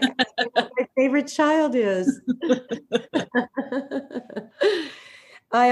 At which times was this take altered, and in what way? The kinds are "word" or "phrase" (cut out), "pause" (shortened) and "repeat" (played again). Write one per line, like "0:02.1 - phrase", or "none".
none